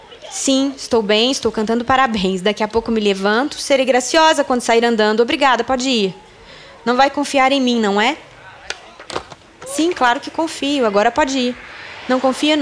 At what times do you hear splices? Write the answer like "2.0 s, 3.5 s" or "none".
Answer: none